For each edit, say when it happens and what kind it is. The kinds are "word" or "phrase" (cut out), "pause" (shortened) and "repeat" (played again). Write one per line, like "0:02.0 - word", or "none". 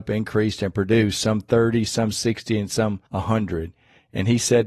0:03.1 - pause